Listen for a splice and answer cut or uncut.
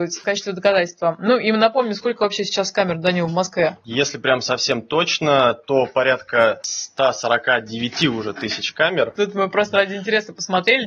uncut